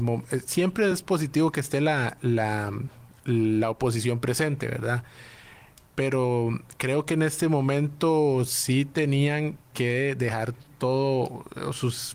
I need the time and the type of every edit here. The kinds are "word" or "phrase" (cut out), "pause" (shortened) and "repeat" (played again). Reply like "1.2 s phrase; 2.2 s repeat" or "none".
none